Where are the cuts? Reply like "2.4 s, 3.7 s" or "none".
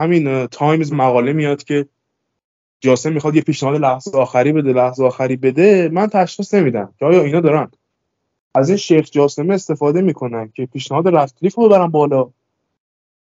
0.9 s